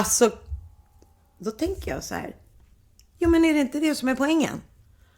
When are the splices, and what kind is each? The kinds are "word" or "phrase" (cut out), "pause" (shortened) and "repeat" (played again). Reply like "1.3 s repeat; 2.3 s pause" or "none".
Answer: none